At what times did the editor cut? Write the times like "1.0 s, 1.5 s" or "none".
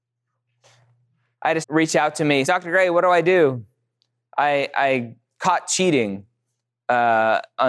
1.6 s, 2.4 s, 5.3 s

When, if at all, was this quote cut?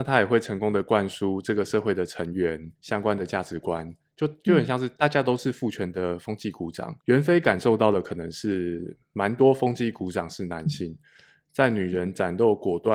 2.8 s, 7.0 s

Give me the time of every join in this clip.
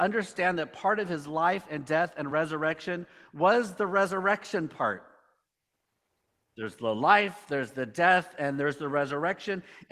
none

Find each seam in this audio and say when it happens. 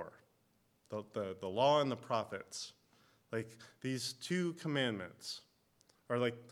none

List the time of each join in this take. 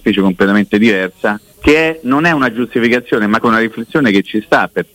1.5 s, 3.4 s

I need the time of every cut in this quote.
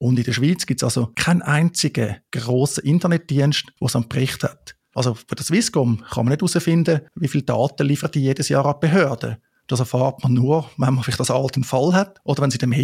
none

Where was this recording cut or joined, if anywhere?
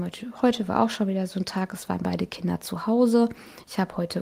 none

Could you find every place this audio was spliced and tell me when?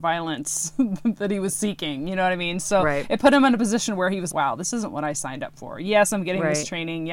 4.3 s

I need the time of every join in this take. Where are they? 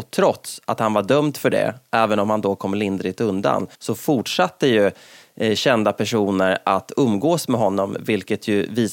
3.7 s

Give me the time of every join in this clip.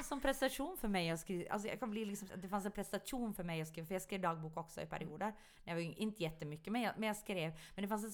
2.3 s, 5.9 s

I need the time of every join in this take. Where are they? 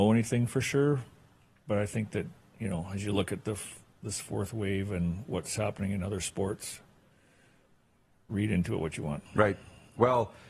9.3 s

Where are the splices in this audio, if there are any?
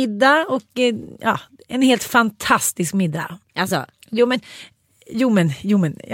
none

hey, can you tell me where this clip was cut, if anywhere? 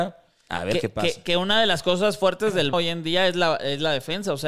2.7 s

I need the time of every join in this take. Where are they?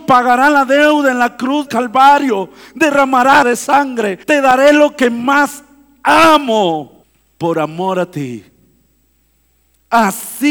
1.7 s, 3.4 s, 4.2 s, 7.0 s

